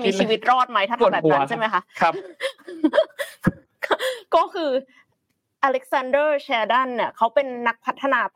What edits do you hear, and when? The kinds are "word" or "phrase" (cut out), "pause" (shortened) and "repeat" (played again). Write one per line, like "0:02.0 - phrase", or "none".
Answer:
none